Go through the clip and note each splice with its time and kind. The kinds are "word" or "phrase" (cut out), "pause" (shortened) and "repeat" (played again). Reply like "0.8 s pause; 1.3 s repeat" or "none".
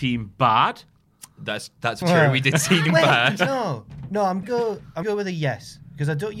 2.0 s word; 2.9 s word; 4.4 s word; 5.0 s word